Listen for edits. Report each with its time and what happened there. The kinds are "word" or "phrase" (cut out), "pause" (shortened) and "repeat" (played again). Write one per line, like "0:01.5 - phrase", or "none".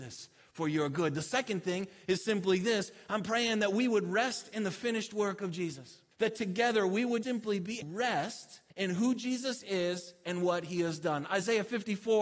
0:06.1 - pause
0:07.2 - word
0:07.8 - phrase
0:08.7 - pause